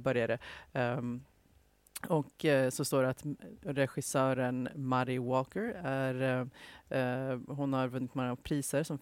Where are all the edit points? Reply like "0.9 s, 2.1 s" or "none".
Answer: none